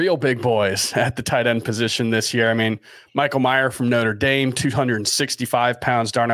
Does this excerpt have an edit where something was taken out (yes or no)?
no